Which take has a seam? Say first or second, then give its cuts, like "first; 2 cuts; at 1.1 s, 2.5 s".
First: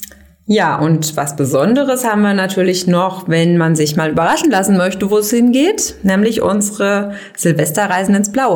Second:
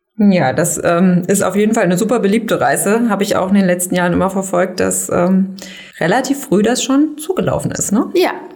second; 1 cut; at 5.9 s